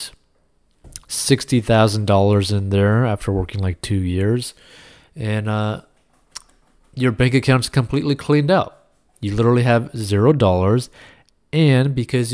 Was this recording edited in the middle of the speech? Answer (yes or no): no